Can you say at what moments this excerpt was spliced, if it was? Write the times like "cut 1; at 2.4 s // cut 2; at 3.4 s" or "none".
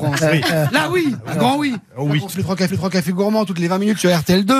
cut 1; at 2.3 s // cut 2; at 2.7 s